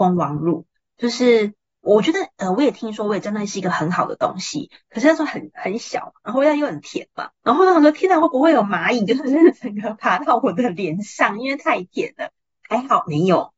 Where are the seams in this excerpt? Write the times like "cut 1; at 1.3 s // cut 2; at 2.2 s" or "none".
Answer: cut 1; at 7.3 s